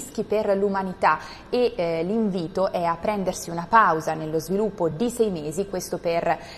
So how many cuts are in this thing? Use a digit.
0